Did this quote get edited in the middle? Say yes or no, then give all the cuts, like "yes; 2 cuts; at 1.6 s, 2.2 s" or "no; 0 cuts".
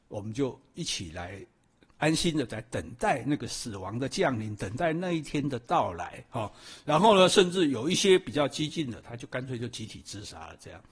no; 0 cuts